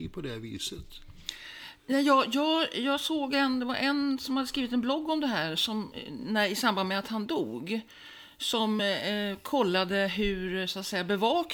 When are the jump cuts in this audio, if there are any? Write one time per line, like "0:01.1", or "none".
none